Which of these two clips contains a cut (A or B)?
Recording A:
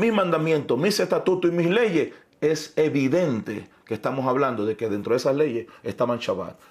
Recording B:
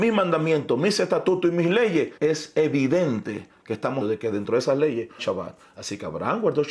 B